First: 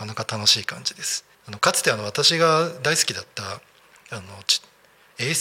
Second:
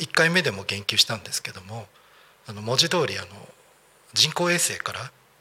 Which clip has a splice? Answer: first; 1 cut; at 1.3 s

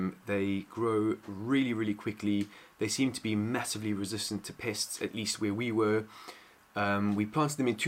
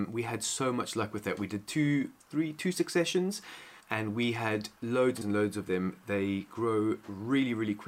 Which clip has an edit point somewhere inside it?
second; 4 cuts; at 2.2 s, 3.8 s, 4.8 s, 5.2 s

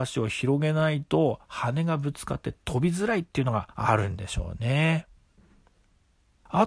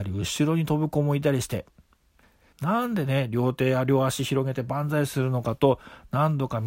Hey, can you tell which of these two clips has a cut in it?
first; 1 cut; at 3.7 s

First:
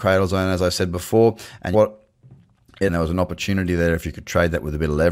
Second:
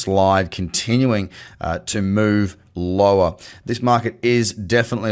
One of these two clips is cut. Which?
first; 2 cuts; at 1.7 s, 2.9 s

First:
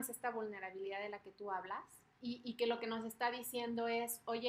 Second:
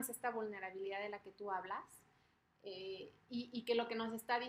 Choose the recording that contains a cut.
first; 1 cut; at 2.2 s

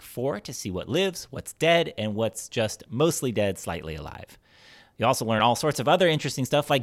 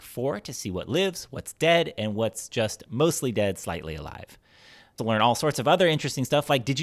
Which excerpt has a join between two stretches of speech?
second; 1 cut; at 5.0 s

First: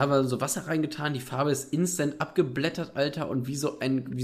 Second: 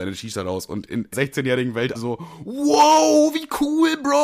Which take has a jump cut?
second; 2 cuts; at 1.1 s, 2.0 s

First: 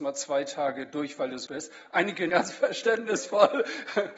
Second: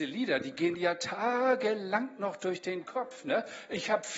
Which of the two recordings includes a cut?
first; 2 cuts; at 1.5 s, 2.3 s

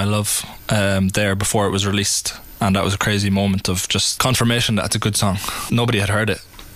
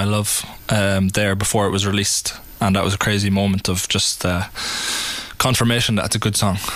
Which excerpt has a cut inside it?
first; 2 cuts; at 4.2 s, 5.7 s

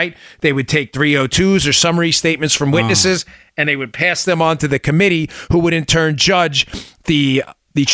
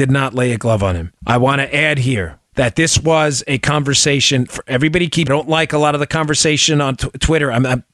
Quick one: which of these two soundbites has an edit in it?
second; 4 cuts; at 1.2 s, 2.5 s, 4.5 s, 5.3 s

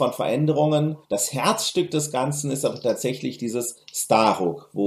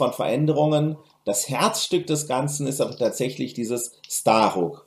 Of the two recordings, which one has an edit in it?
first; 1 cut; at 1.0 s

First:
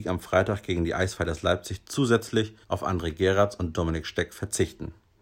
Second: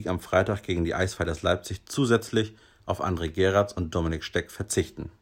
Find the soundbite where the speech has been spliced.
first; 1 cut; at 2.6 s

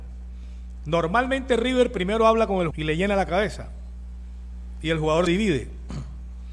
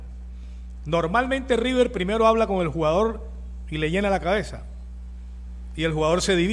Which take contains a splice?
first; 2 cuts; at 2.7 s, 5.3 s

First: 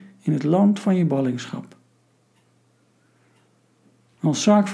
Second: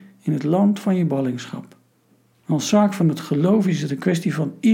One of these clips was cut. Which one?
second; 1 cut; at 1.9 s

